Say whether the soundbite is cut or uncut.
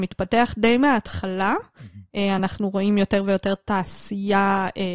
uncut